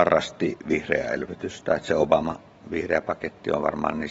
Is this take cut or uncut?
cut